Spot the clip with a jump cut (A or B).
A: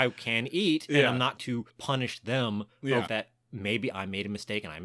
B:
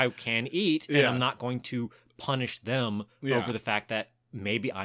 A